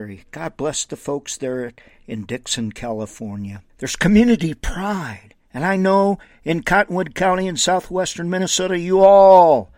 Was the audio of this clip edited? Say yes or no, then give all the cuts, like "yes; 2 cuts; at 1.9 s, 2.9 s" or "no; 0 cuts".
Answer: yes; 2 cuts; at 3.7 s, 5.4 s